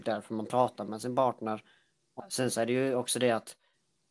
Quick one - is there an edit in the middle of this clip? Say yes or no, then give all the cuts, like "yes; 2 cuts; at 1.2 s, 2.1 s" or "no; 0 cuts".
yes; 1 cut; at 2.2 s